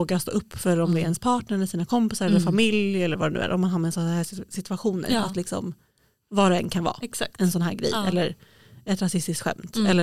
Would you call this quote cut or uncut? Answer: uncut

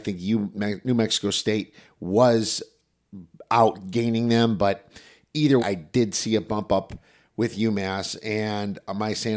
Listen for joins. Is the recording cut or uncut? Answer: cut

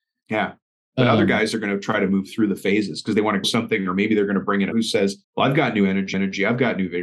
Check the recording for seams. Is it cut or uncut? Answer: cut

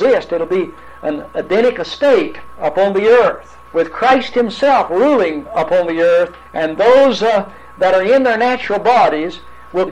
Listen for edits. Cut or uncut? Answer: cut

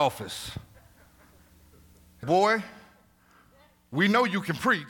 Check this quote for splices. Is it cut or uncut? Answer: cut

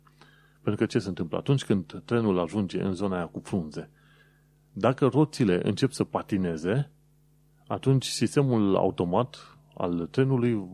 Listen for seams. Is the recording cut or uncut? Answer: uncut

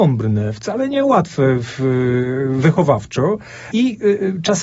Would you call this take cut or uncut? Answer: uncut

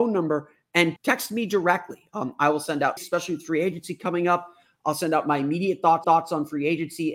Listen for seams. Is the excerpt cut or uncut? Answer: cut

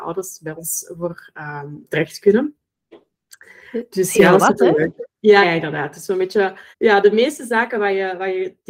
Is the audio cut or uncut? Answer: cut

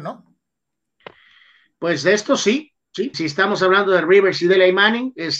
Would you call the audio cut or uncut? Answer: cut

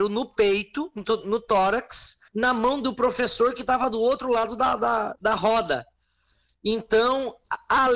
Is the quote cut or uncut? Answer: cut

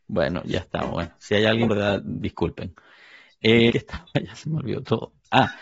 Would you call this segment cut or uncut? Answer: cut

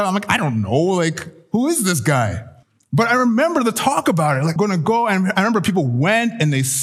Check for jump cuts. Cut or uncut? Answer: cut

